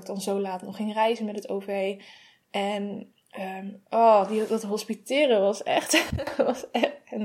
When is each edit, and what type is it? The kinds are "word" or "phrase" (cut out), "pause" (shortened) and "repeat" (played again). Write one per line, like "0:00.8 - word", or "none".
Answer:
none